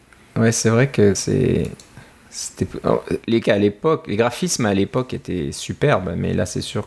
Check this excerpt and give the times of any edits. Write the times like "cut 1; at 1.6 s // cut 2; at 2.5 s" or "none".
cut 1; at 1.1 s // cut 2; at 3.4 s